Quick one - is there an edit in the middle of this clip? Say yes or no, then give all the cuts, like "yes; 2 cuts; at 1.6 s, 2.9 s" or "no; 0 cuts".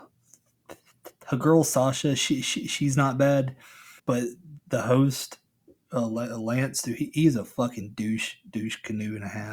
yes; 1 cut; at 4.0 s